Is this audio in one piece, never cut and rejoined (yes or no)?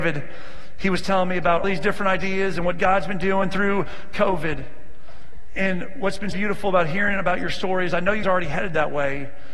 no